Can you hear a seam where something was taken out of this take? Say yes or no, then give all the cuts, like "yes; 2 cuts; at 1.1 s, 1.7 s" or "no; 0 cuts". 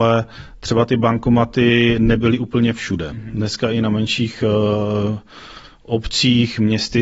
no; 0 cuts